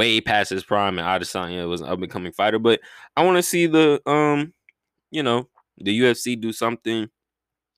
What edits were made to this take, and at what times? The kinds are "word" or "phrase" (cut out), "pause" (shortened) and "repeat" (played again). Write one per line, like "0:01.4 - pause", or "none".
none

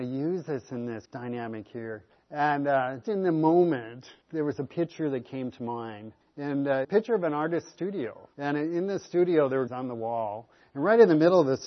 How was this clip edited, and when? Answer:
0:01.1 - word
0:02.1 - pause
0:03.0 - word
0:04.2 - pause
0:06.2 - pause
0:06.8 - phrase
0:08.3 - pause
0:09.7 - phrase

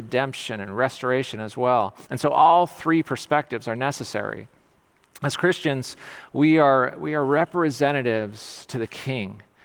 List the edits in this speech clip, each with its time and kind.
0:02.1 - pause

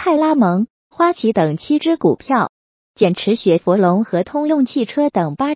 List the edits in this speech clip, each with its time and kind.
none

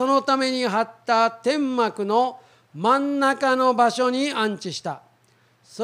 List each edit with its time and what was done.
none

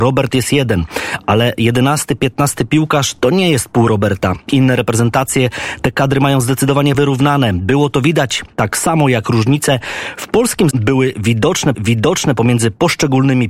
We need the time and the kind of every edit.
0:06.9 - word
0:10.7 - word
0:11.7 - repeat

